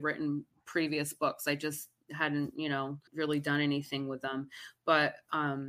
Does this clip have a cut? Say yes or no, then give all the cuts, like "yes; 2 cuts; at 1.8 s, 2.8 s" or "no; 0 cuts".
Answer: yes; 1 cut; at 3.1 s